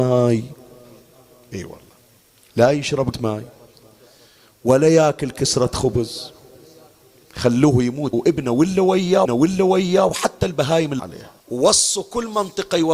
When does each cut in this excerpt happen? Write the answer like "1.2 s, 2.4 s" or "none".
3.1 s, 8.1 s, 9.2 s, 11.0 s, 11.4 s